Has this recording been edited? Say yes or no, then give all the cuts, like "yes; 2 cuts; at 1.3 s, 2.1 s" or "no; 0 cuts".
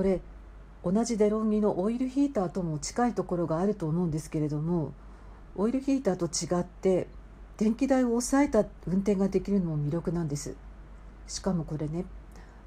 yes; 1 cut; at 7.6 s